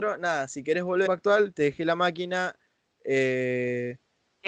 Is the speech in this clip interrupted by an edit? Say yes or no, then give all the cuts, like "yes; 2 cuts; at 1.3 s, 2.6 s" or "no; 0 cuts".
yes; 1 cut; at 1.1 s